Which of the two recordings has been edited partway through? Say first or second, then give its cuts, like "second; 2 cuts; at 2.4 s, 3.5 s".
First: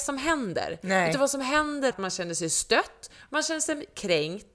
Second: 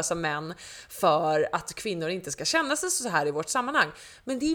first; 1 cut; at 1.9 s